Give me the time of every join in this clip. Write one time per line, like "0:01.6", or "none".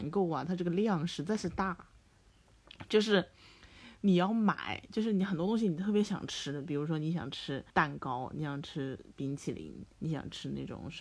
0:07.7
0:09.9